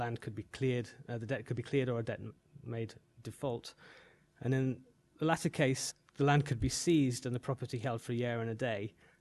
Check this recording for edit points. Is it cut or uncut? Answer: uncut